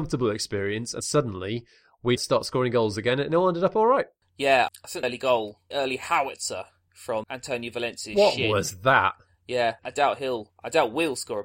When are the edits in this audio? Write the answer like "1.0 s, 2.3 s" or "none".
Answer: 1.0 s, 2.2 s, 5.0 s, 5.7 s, 7.2 s, 9.8 s